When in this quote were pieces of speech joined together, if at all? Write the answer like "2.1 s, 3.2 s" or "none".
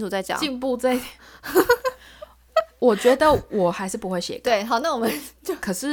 none